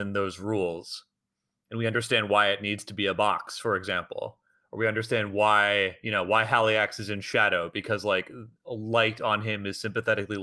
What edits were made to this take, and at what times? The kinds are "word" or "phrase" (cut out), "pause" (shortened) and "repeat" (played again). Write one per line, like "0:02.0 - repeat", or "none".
none